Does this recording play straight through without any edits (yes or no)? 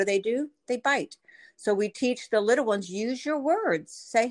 yes